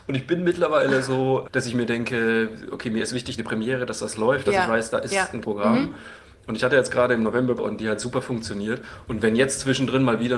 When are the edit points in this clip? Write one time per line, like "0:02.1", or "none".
0:01.4
0:03.4
0:05.4
0:07.6